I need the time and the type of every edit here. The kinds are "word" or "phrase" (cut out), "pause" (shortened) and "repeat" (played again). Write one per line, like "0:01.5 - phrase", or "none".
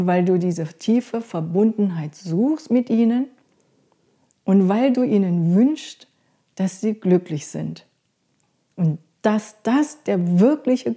none